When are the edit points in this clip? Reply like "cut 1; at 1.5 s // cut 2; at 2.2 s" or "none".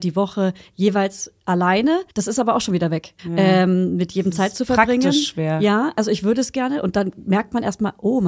cut 1; at 2.1 s // cut 2; at 3.2 s